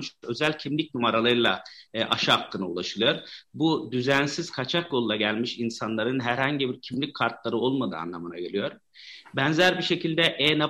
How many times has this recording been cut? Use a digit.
1